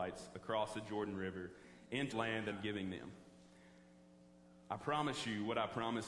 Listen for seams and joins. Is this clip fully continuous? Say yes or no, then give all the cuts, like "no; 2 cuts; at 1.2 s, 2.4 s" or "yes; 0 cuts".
no; 2 cuts; at 2.1 s, 2.5 s